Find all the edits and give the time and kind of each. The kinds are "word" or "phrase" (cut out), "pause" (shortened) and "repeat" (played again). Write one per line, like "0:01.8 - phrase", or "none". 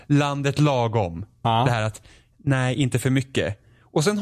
none

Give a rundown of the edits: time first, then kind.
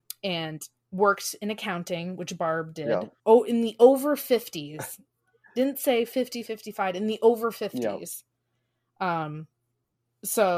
none

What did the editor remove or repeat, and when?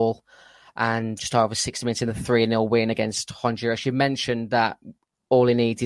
0:01.2 - word

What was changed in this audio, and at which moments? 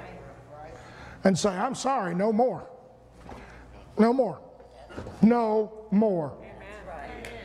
none

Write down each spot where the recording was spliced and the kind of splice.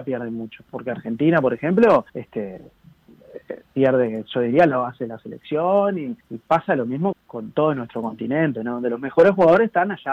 0:02.1 - pause
0:06.2 - pause
0:07.1 - word

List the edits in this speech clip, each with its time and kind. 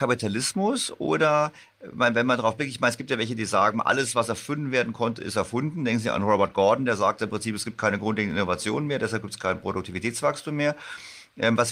none

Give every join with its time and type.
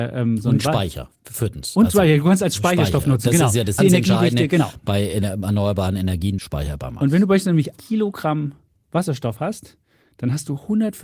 0:03.8 - phrase
0:06.4 - phrase
0:07.8 - word

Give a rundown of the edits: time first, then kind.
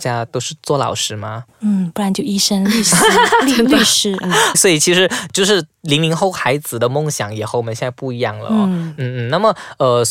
0:01.5 - pause
0:04.5 - word

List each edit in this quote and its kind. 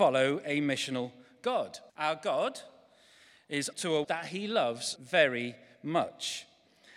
0:01.9 - pause
0:03.7 - phrase
0:04.0 - word
0:05.0 - word

